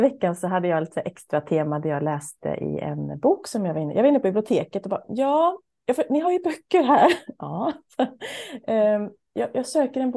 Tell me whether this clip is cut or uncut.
uncut